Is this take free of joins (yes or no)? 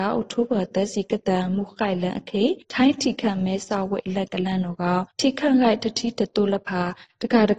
no